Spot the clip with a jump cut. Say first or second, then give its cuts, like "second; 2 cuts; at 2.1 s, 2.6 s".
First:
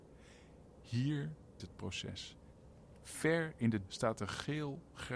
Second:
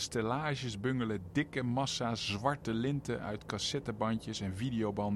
first; 3 cuts; at 1.6 s, 3.0 s, 3.9 s